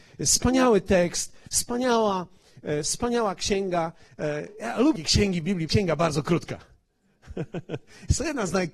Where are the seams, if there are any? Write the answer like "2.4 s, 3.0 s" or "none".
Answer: 5.0 s, 5.7 s

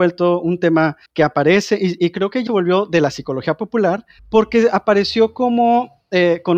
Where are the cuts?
1.1 s, 2.0 s, 2.5 s, 4.2 s

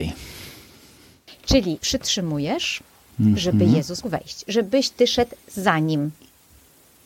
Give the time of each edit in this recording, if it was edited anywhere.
1.8 s, 4.0 s

